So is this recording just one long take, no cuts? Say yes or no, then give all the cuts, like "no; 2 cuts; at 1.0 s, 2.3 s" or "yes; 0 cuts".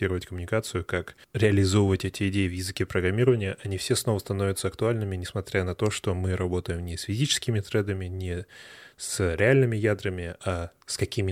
yes; 0 cuts